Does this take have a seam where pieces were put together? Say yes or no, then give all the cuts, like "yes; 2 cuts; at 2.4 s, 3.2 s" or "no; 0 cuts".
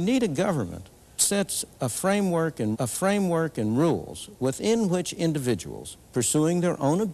yes; 3 cuts; at 1.2 s, 2.7 s, 6.0 s